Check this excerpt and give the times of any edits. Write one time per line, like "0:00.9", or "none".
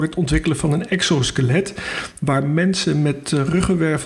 none